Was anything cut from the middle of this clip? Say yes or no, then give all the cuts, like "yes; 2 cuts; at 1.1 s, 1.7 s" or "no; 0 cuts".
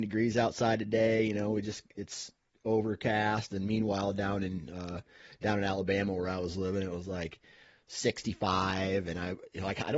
no; 0 cuts